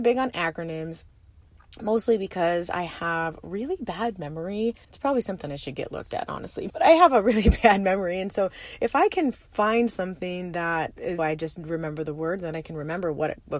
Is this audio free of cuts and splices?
no; 3 cuts; at 4.8 s, 6.7 s, 11.2 s

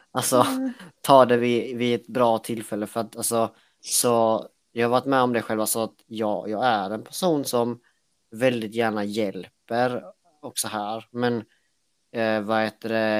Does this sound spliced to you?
no; 0 cuts

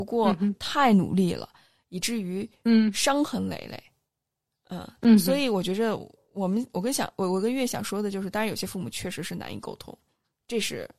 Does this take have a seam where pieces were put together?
no; 0 cuts

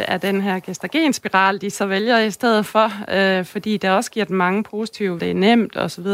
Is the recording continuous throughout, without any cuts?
no; 1 cut; at 5.2 s

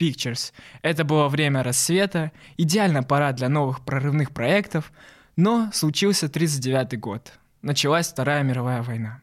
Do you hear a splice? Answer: no; 0 cuts

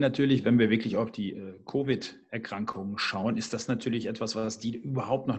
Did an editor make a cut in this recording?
no; 0 cuts

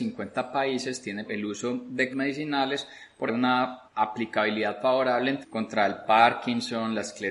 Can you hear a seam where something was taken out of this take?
yes; 5 cuts; at 1.3 s, 2.1 s, 3.3 s, 3.8 s, 5.4 s

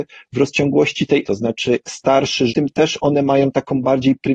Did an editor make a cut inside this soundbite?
yes; 3 cuts; at 1.2 s, 1.8 s, 2.5 s

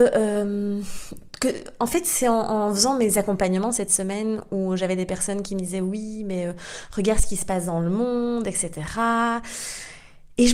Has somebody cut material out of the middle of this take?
no; 0 cuts

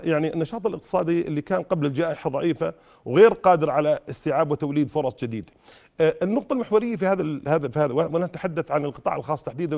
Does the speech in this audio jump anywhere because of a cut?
no; 0 cuts

